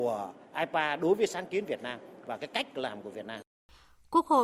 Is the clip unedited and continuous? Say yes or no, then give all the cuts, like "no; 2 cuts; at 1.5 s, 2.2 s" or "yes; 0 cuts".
yes; 0 cuts